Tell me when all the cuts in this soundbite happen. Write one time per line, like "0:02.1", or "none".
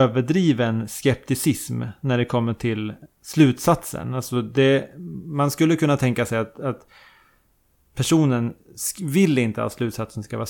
0:03.1

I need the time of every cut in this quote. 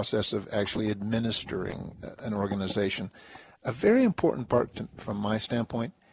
0:04.7

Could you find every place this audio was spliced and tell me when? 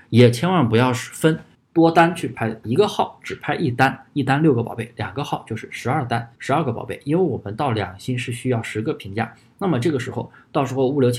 0:01.5
0:02.6
0:06.3

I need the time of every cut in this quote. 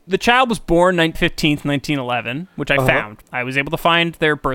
0:01.1
0:03.2

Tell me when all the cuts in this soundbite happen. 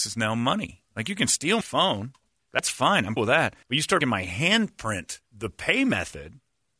0:01.6
0:02.4
0:03.2
0:03.6
0:04.0
0:05.3

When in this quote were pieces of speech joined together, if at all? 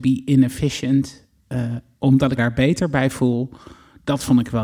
0:02.4

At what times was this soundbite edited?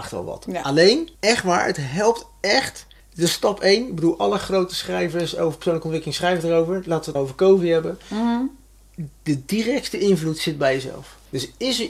0:01.1
0:03.0
0:07.2

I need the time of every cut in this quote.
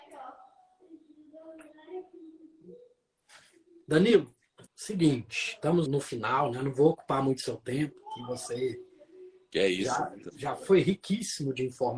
0:04.7
0:05.9

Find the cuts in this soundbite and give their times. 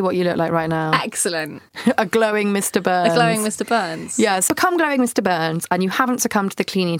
0:04.5

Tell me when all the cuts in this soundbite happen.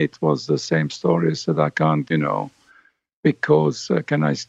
0:02.1

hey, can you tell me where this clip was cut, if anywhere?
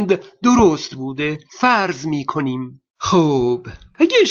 0:01.5
0:02.9

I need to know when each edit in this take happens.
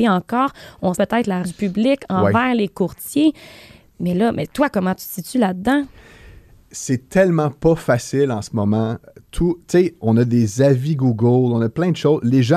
0:01.0
0:01.4

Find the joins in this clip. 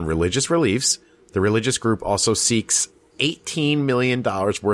none

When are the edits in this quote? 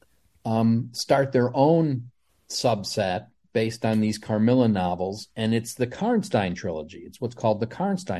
0:02.3

